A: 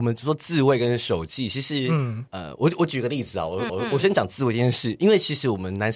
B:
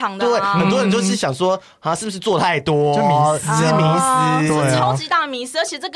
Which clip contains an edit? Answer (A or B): A